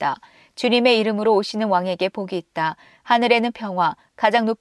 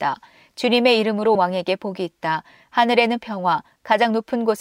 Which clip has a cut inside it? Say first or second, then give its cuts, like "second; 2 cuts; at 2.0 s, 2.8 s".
second; 1 cut; at 1.3 s